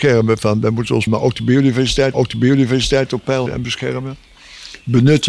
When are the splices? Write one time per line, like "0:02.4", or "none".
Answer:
0:01.1
0:02.1
0:03.5